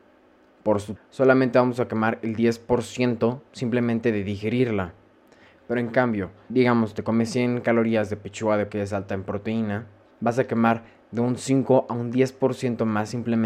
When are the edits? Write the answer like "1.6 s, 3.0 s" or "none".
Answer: 1.0 s, 6.5 s, 8.7 s, 10.1 s